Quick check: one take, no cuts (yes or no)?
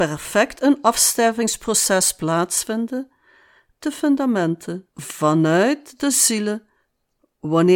no